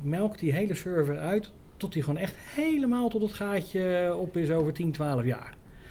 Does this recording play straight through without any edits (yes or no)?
yes